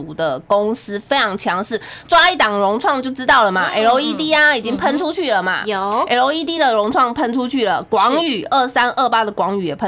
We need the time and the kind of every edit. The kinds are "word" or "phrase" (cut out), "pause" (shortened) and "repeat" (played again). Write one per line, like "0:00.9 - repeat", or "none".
none